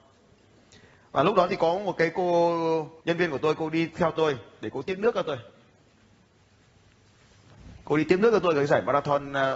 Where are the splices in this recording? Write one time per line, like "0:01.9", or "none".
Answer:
0:03.0

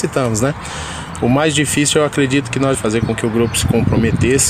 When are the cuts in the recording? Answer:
0:02.7

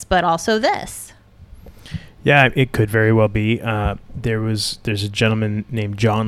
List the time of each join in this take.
none

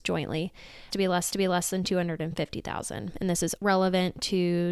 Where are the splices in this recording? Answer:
0:00.9
0:01.3
0:03.6

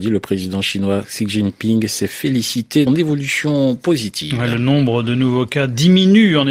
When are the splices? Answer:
0:02.9

